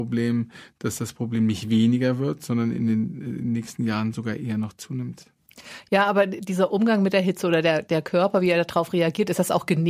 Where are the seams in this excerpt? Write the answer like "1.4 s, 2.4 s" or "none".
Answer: none